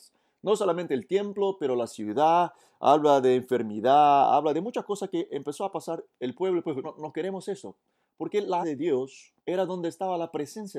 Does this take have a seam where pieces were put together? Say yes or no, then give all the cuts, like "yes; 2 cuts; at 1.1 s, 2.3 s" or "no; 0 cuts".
yes; 3 cuts; at 6.8 s, 8.6 s, 9.4 s